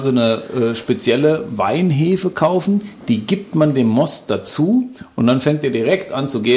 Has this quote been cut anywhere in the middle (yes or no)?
no